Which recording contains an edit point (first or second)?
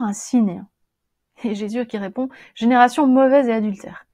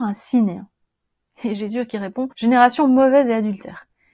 second